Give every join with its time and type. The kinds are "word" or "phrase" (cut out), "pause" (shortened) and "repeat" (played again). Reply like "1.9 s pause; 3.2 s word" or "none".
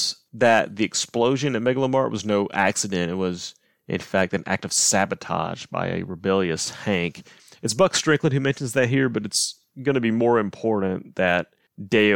none

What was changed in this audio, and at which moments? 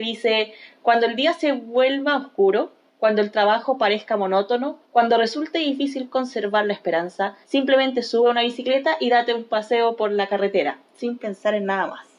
4.8 s pause; 7.4 s pause

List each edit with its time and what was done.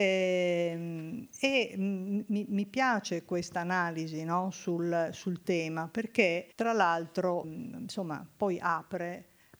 6.5 s pause; 7.4 s word

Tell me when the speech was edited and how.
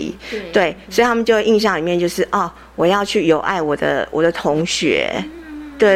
none

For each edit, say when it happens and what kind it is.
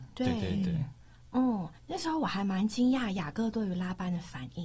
1.8 s pause

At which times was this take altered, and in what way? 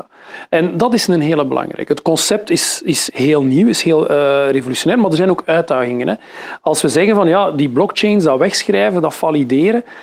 none

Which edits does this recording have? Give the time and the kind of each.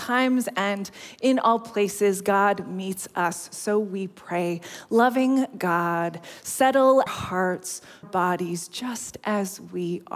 7.1 s word; 8.0 s phrase

